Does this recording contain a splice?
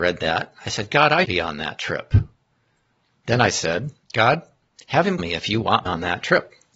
yes; 4 cuts; at 1.2 s, 4.0 s, 5.2 s, 5.9 s

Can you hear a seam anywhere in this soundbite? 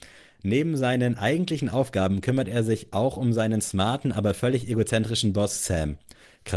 no; 0 cuts

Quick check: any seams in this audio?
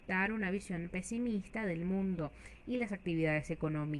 no; 0 cuts

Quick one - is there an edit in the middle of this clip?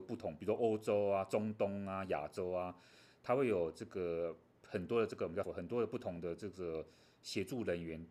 yes; 1 cut; at 5.4 s

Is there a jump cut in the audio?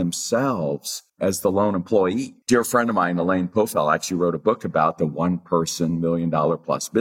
yes; 2 cuts; at 1.1 s, 2.4 s

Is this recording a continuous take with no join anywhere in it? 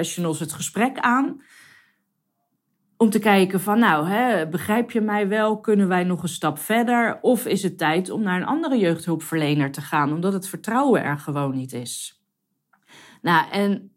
yes; 0 cuts

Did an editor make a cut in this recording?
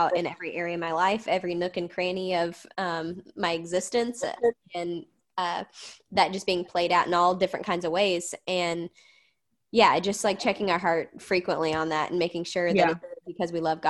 no; 0 cuts

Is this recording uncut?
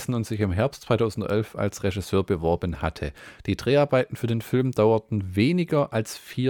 yes; 0 cuts

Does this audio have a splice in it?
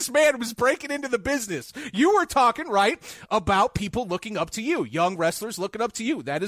no; 0 cuts

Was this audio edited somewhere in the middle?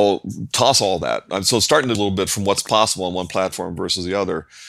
yes; 1 cut; at 1.9 s

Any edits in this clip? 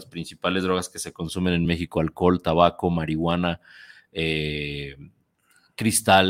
no; 0 cuts

